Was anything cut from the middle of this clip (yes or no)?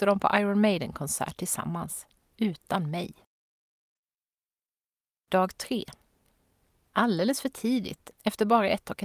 no